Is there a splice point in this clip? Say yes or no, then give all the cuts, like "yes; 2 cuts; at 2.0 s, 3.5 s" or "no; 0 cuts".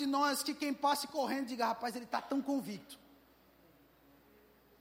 no; 0 cuts